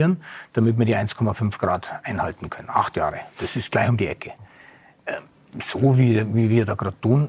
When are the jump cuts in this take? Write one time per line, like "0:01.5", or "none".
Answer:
none